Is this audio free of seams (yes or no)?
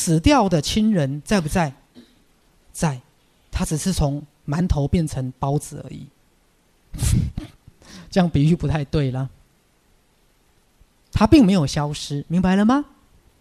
yes